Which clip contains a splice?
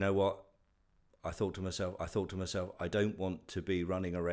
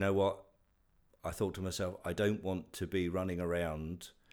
first; 1 cut; at 2.0 s

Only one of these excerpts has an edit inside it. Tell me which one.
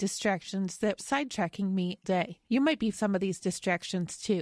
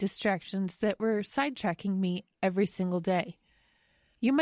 first; 4 cuts; at 1.0 s, 2.0 s, 2.4 s, 2.9 s

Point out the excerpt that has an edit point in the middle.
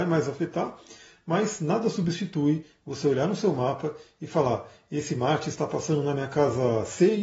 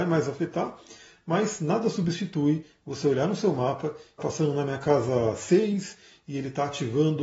second; 1 cut; at 4.2 s

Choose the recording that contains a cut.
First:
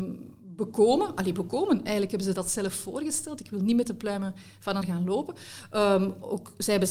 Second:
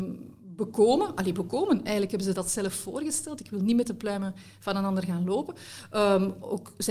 first; 1 cut; at 4.8 s

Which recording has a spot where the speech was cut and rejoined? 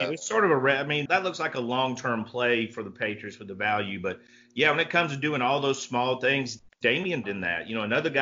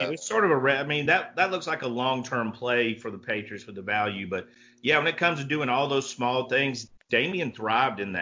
first; 2 cuts; at 1.1 s, 7.2 s

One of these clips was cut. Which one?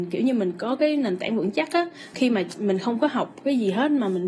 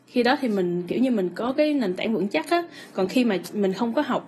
first; 1 cut; at 2.1 s

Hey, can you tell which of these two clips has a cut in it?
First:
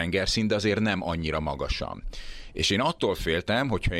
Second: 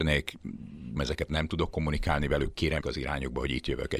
second; 3 cuts; at 1.0 s, 1.3 s, 2.8 s

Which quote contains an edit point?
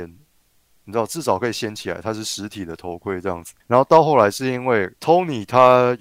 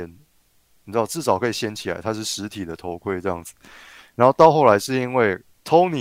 first; 2 cuts; at 3.6 s, 5.0 s

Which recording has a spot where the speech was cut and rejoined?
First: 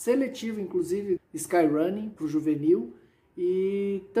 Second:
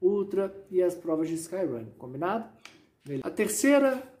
first; 2 cuts; at 1.2 s, 2.2 s

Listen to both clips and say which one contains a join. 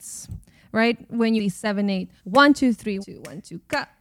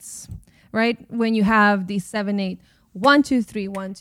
first; 3 cuts; at 1.4 s, 2.2 s, 3.0 s

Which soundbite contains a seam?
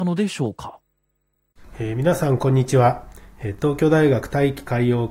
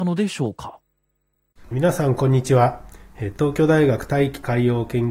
second; 1 cut; at 1.7 s

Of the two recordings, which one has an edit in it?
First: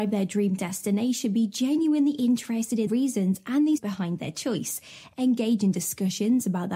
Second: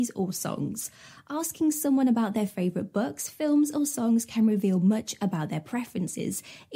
first; 2 cuts; at 2.9 s, 3.8 s

